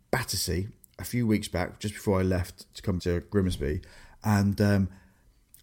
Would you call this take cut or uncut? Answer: cut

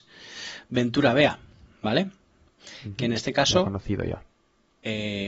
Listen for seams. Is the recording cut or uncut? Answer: uncut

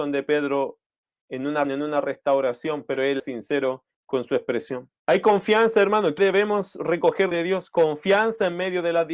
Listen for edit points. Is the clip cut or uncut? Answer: cut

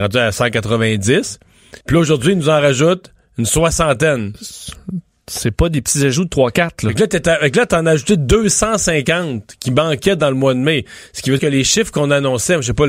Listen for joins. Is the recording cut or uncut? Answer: cut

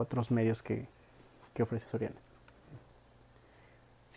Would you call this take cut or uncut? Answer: uncut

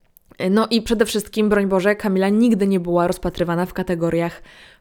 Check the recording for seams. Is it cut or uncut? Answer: uncut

